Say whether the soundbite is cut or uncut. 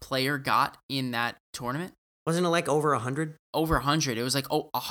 cut